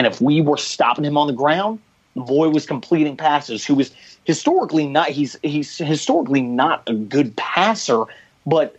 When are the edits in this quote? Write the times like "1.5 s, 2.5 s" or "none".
none

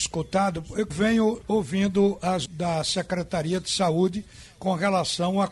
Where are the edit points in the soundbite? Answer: 0.9 s, 1.4 s, 2.5 s

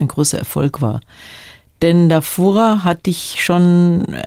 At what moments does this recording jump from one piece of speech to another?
none

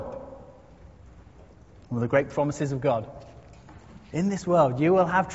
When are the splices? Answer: none

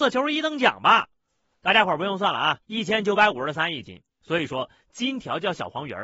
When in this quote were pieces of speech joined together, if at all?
2.6 s, 4.1 s

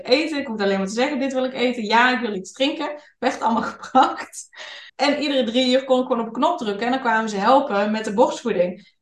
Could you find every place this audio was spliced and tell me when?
4.9 s

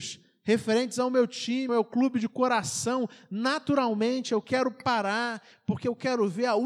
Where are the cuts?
1.7 s

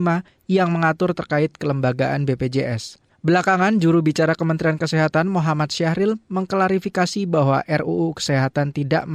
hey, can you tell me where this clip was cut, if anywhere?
none

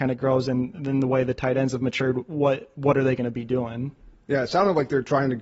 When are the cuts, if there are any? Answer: none

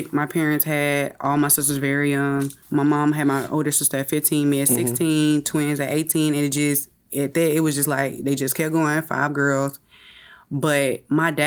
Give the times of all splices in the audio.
2.6 s

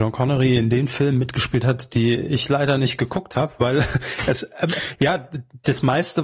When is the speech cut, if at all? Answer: none

